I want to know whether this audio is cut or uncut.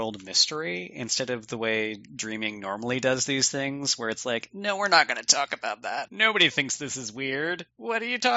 uncut